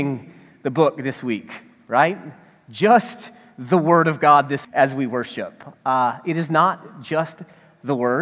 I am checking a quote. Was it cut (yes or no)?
yes